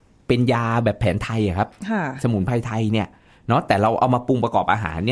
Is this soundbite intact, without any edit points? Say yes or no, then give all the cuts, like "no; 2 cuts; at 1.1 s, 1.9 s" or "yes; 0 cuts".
yes; 0 cuts